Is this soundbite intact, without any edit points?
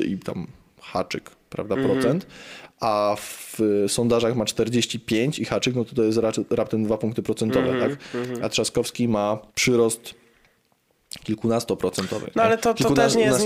no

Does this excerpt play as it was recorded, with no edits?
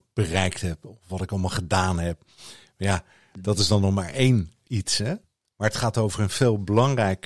yes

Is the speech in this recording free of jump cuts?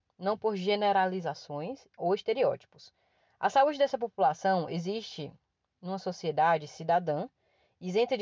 yes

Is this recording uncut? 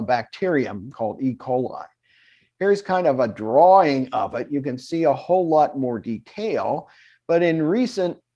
yes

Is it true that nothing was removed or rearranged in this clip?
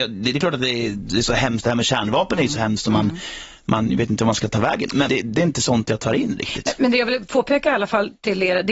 no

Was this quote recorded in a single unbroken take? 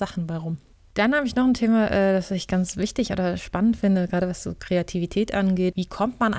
yes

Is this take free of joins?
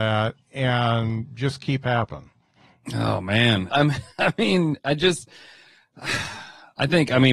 no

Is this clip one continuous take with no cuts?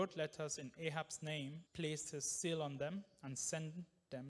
no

